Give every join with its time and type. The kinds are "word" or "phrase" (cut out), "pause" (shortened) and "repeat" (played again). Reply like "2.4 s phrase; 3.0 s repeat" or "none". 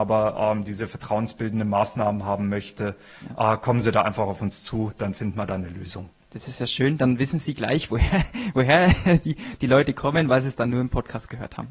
none